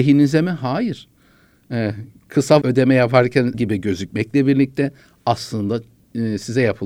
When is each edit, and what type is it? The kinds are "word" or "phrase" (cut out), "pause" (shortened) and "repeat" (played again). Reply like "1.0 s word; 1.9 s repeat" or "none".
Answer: 2.6 s word; 3.5 s word